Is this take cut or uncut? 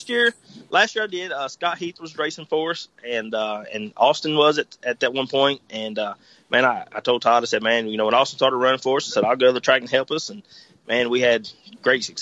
uncut